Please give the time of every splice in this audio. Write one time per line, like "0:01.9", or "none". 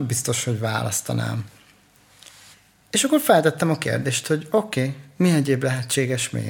0:02.5

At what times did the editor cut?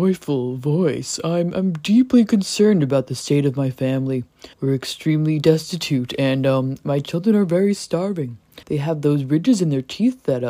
0:04.5
0:08.6

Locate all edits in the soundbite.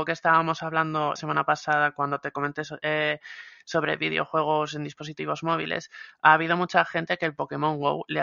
0:01.2

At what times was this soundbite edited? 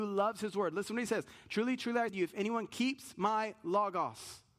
0:02.1

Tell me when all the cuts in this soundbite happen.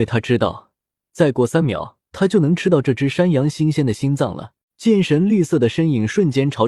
0:02.0
0:04.6

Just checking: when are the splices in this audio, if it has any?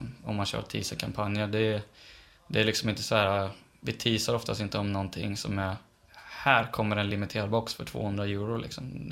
none

